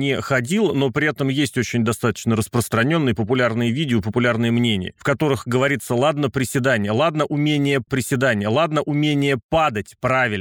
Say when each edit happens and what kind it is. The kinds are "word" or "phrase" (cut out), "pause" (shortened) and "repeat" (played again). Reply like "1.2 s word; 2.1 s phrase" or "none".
7.9 s repeat